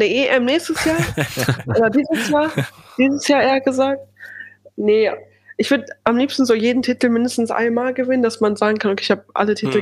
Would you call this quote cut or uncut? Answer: uncut